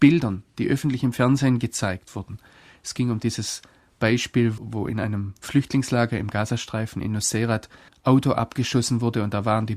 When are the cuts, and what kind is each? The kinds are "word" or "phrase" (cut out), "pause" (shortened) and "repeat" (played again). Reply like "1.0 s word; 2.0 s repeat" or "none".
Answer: 4.6 s word; 7.9 s word